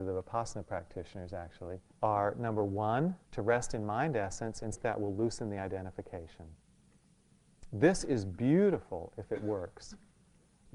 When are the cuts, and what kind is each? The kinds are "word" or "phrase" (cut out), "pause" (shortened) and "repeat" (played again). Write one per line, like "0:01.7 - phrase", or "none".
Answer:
0:01.9 - pause
0:03.2 - pause
0:04.7 - word